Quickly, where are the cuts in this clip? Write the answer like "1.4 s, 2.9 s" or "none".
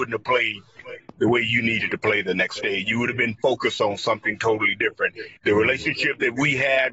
5.4 s